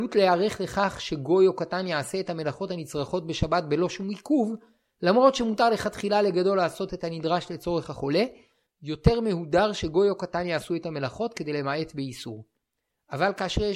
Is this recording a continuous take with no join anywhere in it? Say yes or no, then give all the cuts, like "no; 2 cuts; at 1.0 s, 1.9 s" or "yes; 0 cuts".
yes; 0 cuts